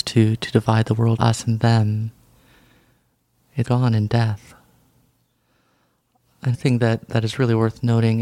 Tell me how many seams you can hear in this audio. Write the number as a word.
three